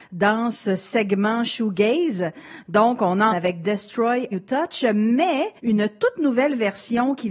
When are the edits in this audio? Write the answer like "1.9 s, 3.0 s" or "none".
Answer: 3.3 s, 4.3 s, 5.6 s